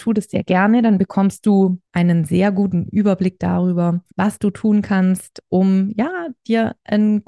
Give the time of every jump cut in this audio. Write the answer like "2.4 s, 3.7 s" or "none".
1.9 s, 4.1 s